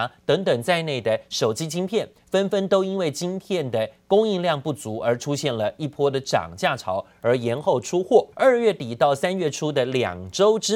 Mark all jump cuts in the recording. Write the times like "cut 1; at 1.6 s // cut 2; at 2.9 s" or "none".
cut 1; at 8.3 s

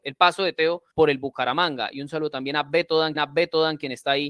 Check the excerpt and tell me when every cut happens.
cut 1; at 0.9 s // cut 2; at 3.1 s

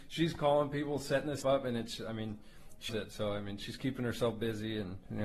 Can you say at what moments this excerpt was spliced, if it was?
cut 1; at 1.4 s // cut 2; at 2.9 s

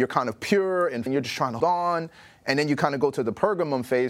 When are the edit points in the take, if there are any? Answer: cut 1; at 1.1 s // cut 2; at 1.6 s

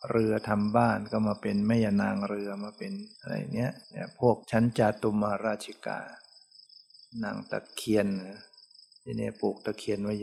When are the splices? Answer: cut 1; at 3.1 s // cut 2; at 3.8 s // cut 3; at 4.4 s

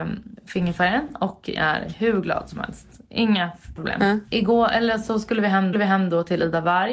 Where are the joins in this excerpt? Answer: cut 1; at 1.6 s // cut 2; at 3.8 s // cut 3; at 4.3 s // cut 4; at 5.7 s

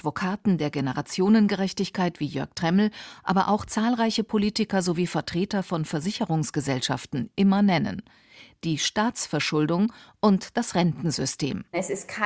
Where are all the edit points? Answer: none

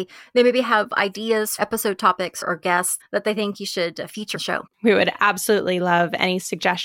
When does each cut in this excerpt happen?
cut 1; at 1.6 s // cut 2; at 2.4 s // cut 3; at 3.0 s // cut 4; at 4.3 s // cut 5; at 4.7 s

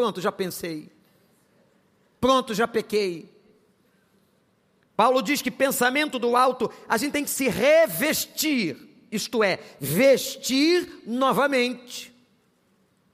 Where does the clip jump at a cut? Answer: none

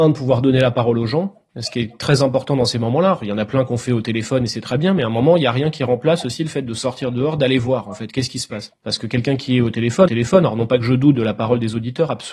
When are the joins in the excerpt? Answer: cut 1; at 10.1 s

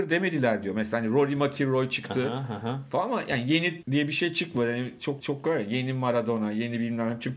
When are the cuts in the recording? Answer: cut 1; at 3.8 s // cut 2; at 5.2 s

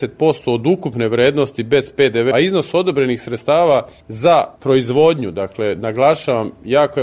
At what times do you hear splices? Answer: cut 1; at 2.3 s

